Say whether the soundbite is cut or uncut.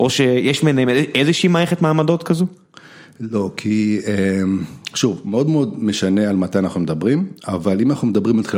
uncut